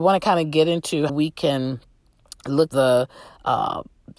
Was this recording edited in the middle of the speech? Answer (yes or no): yes